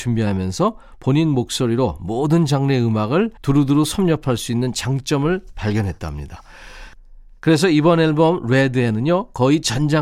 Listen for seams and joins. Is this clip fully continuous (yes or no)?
no